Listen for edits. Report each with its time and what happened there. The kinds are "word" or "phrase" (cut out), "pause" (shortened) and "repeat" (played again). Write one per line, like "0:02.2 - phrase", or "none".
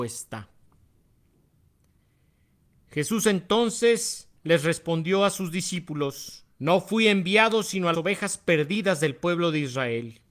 0:04.4 - pause
0:06.5 - pause
0:07.9 - word

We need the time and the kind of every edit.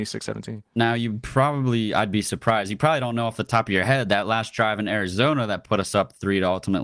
none

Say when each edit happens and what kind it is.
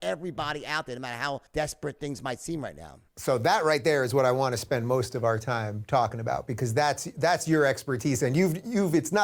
0:01.5 - pause
0:03.1 - pause

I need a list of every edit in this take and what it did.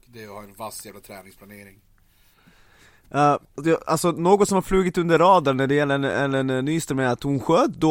0:03.4 - pause

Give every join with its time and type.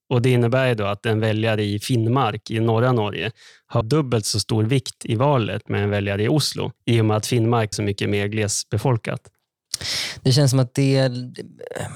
0:03.8 - word
0:05.7 - word
0:06.8 - pause
0:07.7 - word

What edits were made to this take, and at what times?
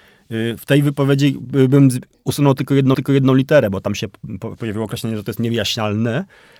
0:02.9 - repeat
0:04.6 - word

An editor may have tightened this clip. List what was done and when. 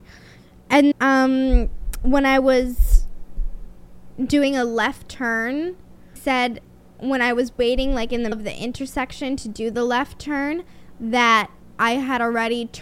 0:00.9 - word
0:06.2 - word
0:08.3 - word

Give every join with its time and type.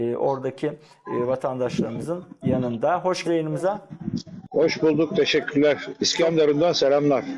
0:03.2 - word

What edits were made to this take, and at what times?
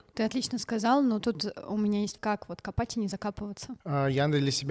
0:02.2 - word
0:03.8 - pause

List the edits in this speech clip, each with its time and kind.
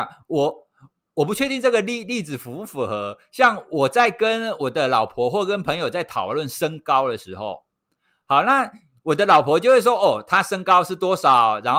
none

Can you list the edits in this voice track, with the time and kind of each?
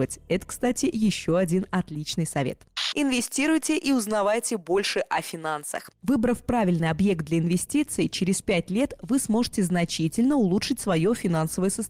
none

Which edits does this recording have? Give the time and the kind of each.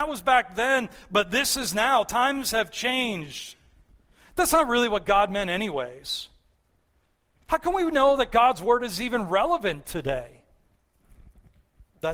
none

